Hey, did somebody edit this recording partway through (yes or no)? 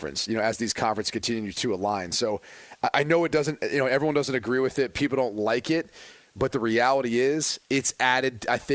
no